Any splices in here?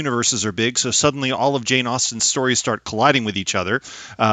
no; 0 cuts

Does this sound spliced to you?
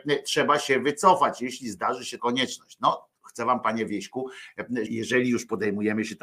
yes; 3 cuts; at 2.2 s, 3.6 s, 4.9 s

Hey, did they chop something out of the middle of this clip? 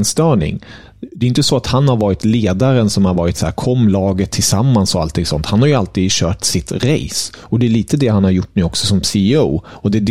no; 0 cuts

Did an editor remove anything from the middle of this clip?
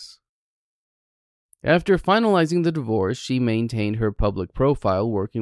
no; 0 cuts

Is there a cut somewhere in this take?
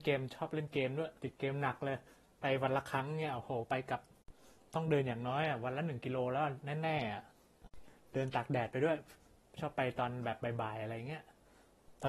yes; 1 cut; at 1.2 s

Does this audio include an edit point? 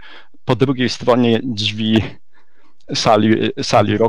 no; 0 cuts

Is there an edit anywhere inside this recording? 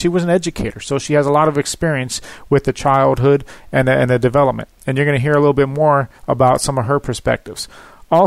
yes; 1 cut; at 6.2 s

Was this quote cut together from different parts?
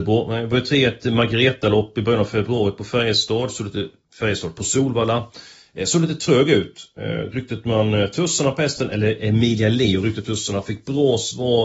no; 0 cuts

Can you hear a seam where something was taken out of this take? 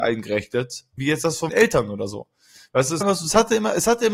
yes; 3 cuts; at 1.0 s, 1.5 s, 3.0 s

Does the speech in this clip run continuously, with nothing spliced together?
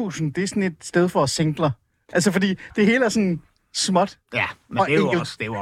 yes; 0 cuts

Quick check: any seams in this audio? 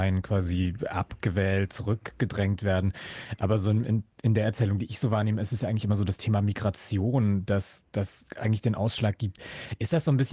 no; 0 cuts

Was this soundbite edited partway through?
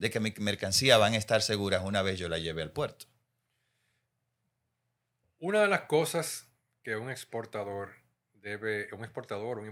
no; 0 cuts

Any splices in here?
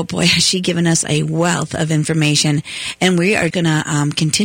yes; 1 cut; at 3.5 s

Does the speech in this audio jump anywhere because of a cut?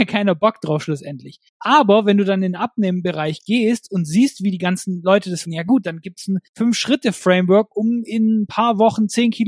yes; 3 cuts; at 1.5 s, 5.4 s, 6.5 s

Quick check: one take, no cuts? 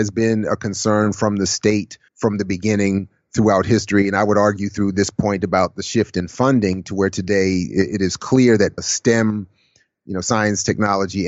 no; 2 cuts; at 2.1 s, 8.8 s

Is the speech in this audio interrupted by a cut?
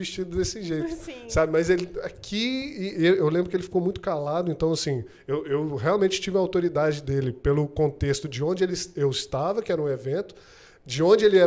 no; 0 cuts

